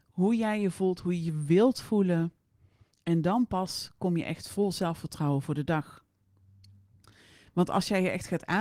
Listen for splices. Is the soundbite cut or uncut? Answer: uncut